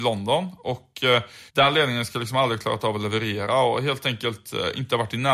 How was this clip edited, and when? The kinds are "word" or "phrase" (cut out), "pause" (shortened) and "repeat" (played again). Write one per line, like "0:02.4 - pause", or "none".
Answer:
0:01.5 - pause